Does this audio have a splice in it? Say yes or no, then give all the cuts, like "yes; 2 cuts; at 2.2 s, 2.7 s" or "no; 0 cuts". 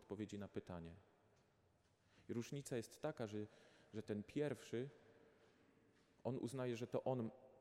no; 0 cuts